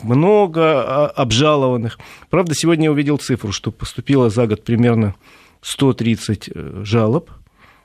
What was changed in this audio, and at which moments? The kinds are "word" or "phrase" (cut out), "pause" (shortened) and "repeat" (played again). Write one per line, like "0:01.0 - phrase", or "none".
none

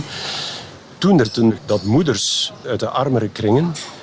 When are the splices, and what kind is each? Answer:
0:01.2 - phrase
0:01.6 - word

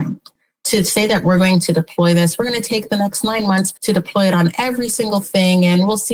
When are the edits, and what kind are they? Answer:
0:03.8 - pause

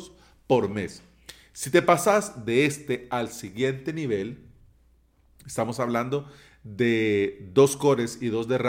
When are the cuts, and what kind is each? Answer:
none

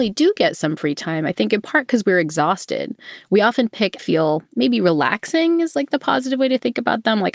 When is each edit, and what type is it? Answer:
0:04.0 - phrase

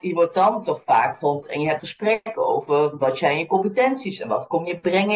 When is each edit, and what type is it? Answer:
0:01.4 - word
0:01.8 - word

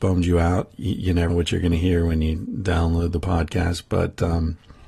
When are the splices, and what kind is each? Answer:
0:01.3 - word

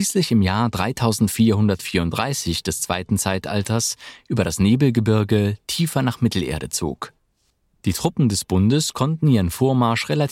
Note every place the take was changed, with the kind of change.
none

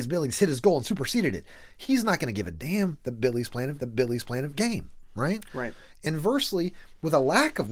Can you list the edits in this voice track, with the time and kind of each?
0:03.8 - repeat

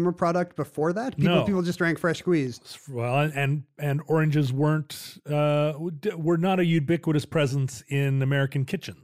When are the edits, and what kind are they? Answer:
none

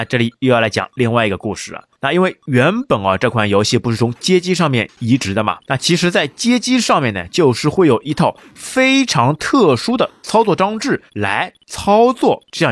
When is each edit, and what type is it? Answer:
0:01.9 - pause
0:05.6 - pause
0:11.1 - pause

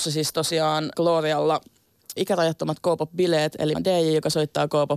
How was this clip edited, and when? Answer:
0:00.9 - word
0:02.2 - word
0:03.7 - word

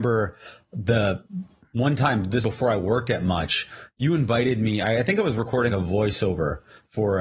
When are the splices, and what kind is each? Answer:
0:02.4 - word
0:05.7 - word

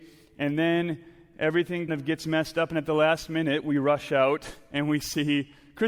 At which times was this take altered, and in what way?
0:01.9 - word

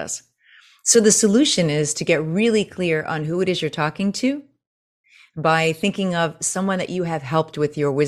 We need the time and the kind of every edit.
none

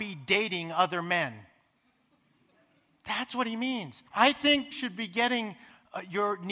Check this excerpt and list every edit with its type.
0:04.1 - pause
0:04.7 - phrase

